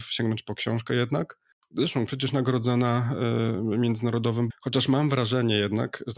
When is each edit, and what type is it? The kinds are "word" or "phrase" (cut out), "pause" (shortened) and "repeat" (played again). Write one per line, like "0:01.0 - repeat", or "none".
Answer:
0:02.1 - word
0:04.5 - word